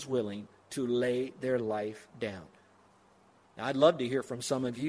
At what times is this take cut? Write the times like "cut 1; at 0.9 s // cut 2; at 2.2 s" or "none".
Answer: none